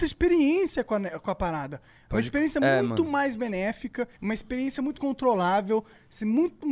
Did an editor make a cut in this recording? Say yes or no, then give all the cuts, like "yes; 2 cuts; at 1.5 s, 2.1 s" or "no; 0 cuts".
yes; 2 cuts; at 4.1 s, 5.0 s